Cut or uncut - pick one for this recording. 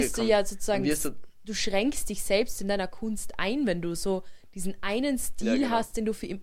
uncut